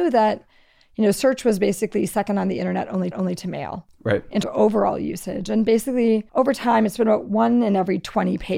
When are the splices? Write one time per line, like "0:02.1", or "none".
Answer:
0:03.1
0:04.4
0:06.3